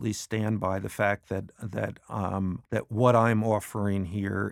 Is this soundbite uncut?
no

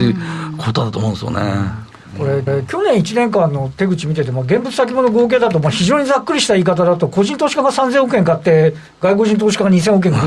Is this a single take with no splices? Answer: no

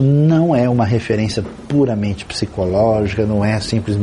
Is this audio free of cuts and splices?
yes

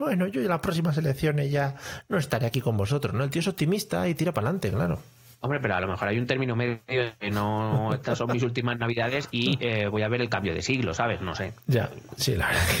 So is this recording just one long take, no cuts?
yes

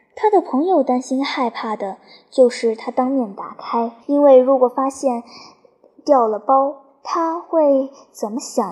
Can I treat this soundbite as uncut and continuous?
no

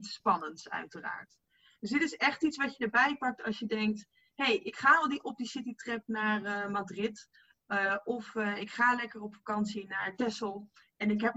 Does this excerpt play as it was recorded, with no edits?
yes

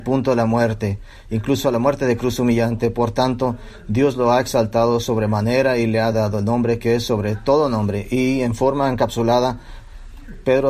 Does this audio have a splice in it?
no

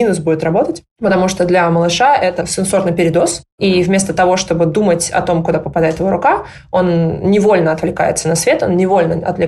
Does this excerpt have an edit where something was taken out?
no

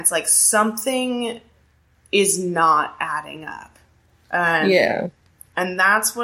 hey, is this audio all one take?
yes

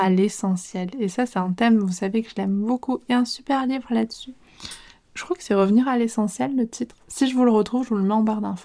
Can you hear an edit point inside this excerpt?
no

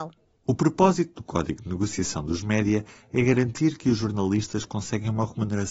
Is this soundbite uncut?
yes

